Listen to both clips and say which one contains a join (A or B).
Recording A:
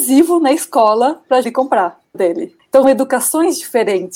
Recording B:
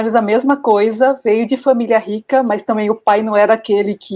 A